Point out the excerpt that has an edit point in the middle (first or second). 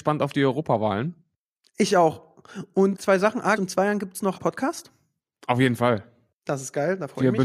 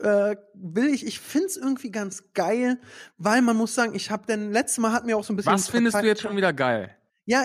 first